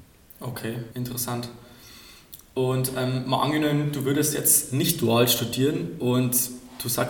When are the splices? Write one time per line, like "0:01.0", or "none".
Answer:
0:00.9